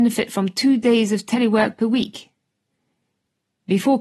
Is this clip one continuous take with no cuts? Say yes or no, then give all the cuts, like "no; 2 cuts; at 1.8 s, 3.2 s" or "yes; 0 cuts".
yes; 0 cuts